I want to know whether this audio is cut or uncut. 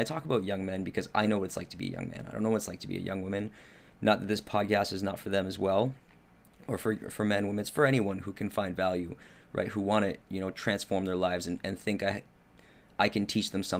uncut